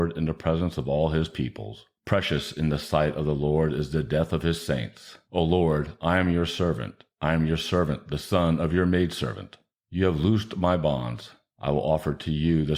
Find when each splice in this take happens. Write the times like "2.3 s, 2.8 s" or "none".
none